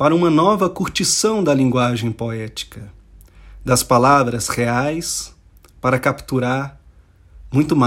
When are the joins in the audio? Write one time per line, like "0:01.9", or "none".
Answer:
none